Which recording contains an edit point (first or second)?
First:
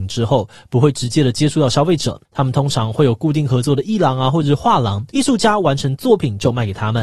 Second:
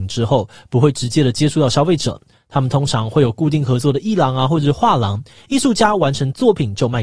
first